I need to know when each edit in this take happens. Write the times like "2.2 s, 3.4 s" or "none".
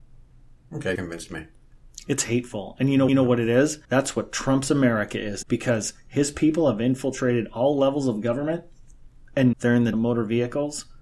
0.9 s, 3.1 s, 3.8 s, 5.4 s, 9.5 s, 9.9 s